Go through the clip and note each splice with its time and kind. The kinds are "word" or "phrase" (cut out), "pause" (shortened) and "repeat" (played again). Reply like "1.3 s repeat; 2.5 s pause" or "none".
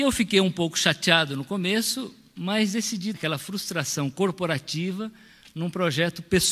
3.1 s word